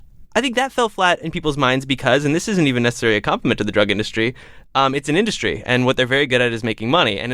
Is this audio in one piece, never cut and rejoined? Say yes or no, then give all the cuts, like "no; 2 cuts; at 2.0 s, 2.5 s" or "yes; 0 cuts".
yes; 0 cuts